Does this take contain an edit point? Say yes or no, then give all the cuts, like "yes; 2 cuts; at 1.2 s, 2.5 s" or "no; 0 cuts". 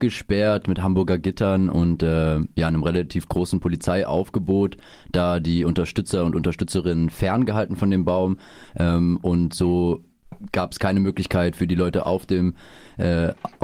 no; 0 cuts